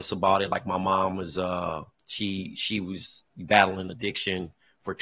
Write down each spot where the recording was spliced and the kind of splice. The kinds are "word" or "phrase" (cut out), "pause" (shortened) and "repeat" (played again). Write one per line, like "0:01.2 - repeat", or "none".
0:01.9 - pause